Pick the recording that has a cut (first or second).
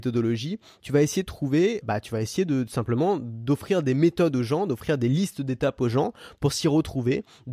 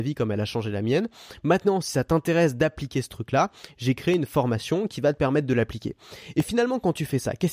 first